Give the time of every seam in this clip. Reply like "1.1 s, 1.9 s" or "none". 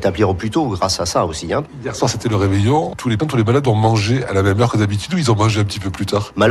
3.2 s